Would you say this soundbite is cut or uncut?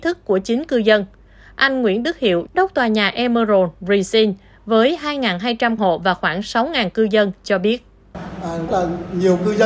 cut